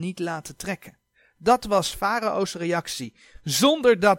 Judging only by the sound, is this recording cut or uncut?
uncut